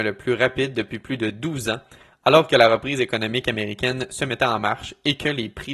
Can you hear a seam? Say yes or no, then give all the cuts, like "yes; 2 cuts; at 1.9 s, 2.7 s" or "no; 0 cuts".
no; 0 cuts